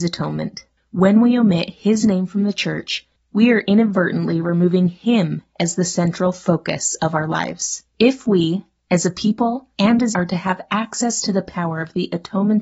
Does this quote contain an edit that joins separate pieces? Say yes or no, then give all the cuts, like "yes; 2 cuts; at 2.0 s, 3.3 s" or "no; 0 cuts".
yes; 3 cuts; at 7.9 s, 9.7 s, 10.1 s